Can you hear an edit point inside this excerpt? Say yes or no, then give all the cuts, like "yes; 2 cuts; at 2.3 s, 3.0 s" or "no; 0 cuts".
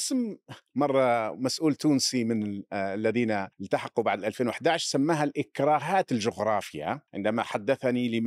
yes; 2 cuts; at 3.5 s, 7.1 s